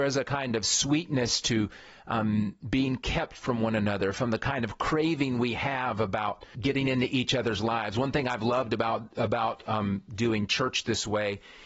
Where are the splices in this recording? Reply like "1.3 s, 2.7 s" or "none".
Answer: 6.5 s